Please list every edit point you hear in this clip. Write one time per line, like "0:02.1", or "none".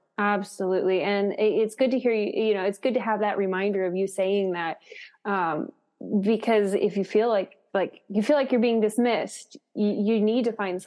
none